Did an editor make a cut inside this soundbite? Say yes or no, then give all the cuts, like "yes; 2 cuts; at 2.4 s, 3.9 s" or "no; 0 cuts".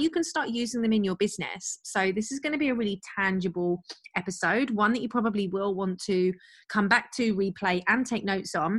no; 0 cuts